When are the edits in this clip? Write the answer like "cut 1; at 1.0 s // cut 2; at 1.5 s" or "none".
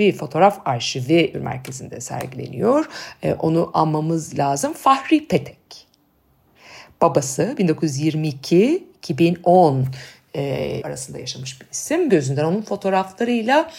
cut 1; at 1.3 s // cut 2; at 10.8 s // cut 3; at 12.1 s